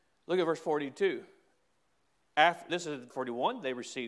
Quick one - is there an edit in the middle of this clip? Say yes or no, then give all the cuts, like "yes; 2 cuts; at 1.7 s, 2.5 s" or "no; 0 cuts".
yes; 2 cuts; at 2.7 s, 3.1 s